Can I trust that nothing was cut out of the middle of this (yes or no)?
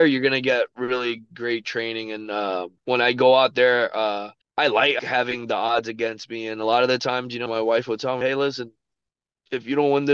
no